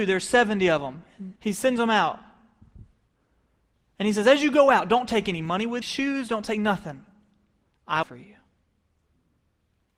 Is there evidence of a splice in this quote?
yes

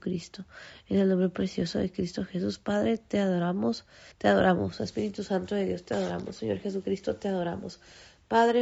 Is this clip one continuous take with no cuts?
no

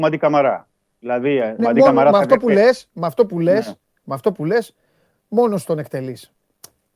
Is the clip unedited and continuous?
no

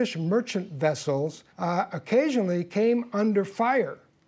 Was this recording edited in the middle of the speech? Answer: yes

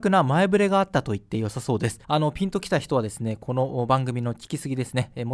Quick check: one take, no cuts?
no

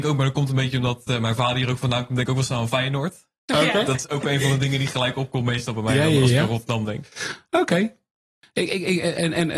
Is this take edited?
no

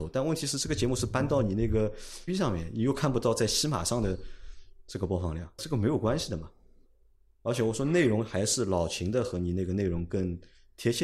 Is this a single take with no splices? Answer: no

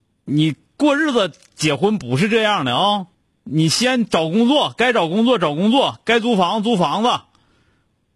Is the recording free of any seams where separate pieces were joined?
no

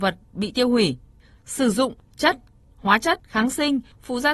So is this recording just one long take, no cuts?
yes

